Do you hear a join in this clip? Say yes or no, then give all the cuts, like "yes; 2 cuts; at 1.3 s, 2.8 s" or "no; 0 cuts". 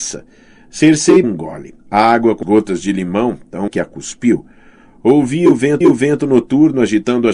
yes; 5 cuts; at 1.2 s, 1.8 s, 2.4 s, 3.7 s, 5.8 s